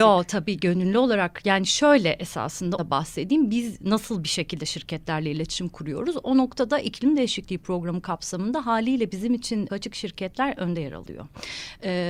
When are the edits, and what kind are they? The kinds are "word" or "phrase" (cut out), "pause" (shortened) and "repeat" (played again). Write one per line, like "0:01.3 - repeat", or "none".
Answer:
0:02.8 - word
0:09.7 - phrase